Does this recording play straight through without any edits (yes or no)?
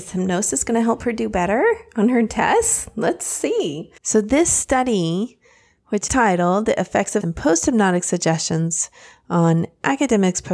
no